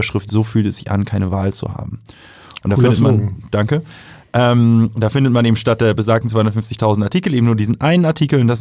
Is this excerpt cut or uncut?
uncut